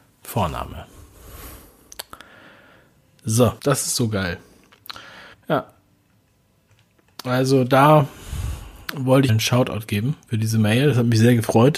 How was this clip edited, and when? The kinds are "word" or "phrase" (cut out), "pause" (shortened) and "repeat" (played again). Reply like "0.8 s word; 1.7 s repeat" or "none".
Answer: 3.6 s pause; 5.3 s pause; 9.3 s phrase